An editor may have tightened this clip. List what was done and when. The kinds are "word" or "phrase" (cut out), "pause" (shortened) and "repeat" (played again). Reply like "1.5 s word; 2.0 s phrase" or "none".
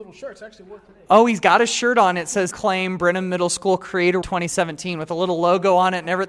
2.5 s phrase; 4.2 s word